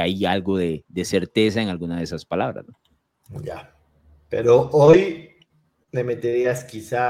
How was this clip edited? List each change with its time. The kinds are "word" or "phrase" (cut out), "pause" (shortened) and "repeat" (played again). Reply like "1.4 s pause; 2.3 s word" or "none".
none